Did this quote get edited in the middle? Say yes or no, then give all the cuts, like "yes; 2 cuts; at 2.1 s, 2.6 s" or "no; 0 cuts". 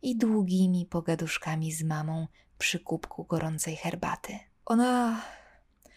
no; 0 cuts